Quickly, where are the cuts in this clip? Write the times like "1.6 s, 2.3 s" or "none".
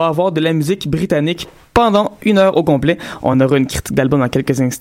none